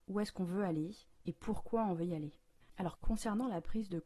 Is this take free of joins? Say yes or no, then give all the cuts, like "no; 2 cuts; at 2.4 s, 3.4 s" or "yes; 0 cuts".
yes; 0 cuts